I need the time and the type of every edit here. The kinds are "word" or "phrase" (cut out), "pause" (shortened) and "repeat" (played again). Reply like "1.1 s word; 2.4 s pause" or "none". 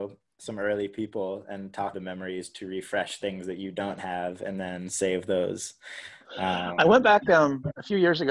1.9 s phrase